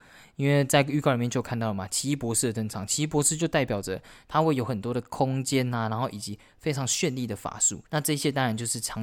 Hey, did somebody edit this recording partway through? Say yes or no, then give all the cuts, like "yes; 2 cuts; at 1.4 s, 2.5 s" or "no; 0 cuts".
yes; 1 cut; at 7.9 s